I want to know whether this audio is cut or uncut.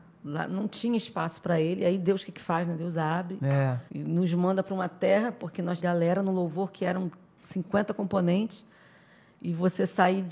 cut